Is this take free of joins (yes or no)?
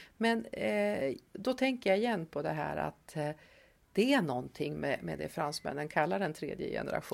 yes